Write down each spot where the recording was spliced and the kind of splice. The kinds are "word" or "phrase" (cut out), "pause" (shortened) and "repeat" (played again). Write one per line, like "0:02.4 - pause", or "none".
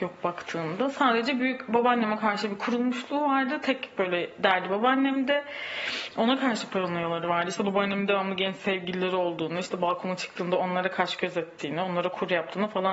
none